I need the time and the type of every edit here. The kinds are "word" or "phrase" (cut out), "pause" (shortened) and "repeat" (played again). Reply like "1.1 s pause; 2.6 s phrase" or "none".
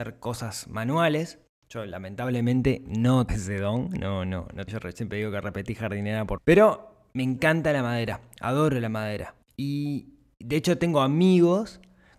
3.3 s word; 4.7 s word; 6.4 s word; 9.4 s pause